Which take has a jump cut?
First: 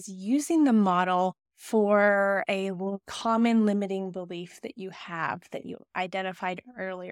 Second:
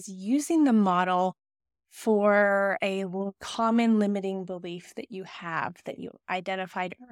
first; 1 cut; at 1.4 s

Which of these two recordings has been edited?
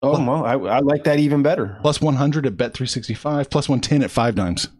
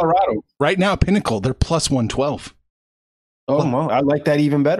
second; 1 cut; at 3.9 s

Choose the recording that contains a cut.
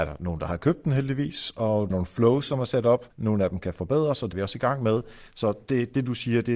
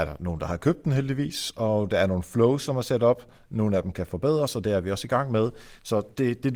first; 3 cuts; at 1.9 s, 3.1 s, 4.3 s

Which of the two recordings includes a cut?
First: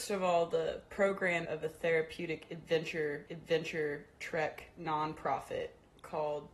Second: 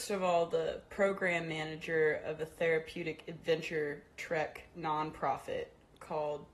first; 2 cuts; at 1.5 s, 3.3 s

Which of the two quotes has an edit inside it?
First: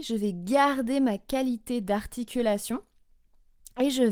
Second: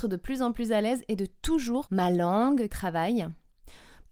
second; 2 cuts; at 1.9 s, 2.7 s

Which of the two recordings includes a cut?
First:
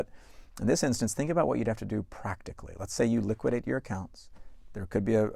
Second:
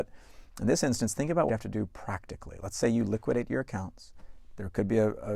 second; 1 cut; at 1.5 s

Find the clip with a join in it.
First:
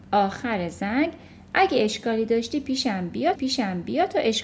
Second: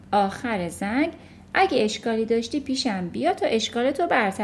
first; 1 cut; at 3.3 s

